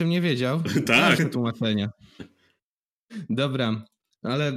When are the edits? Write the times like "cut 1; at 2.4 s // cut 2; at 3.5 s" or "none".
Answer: cut 1; at 1.2 s